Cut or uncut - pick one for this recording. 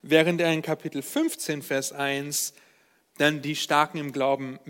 uncut